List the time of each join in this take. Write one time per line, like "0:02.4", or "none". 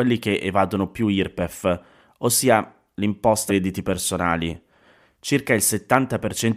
0:03.5